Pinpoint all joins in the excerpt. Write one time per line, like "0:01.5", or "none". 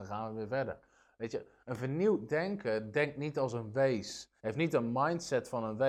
0:04.4